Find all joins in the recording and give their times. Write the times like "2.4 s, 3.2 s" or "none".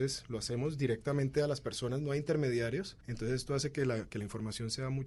3.0 s